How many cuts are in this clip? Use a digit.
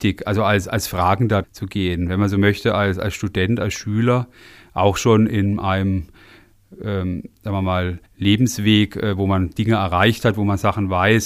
2